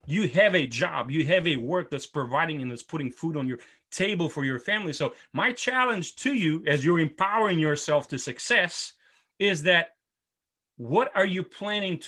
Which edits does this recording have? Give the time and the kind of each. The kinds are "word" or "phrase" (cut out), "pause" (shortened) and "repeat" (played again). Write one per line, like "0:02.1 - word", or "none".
none